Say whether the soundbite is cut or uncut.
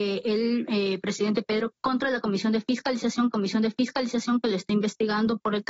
cut